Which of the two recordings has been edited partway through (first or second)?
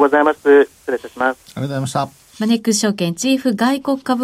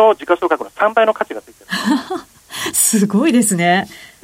first